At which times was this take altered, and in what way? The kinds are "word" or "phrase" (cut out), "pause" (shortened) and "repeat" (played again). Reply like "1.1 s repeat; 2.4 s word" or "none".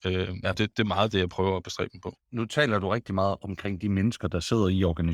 2.2 s pause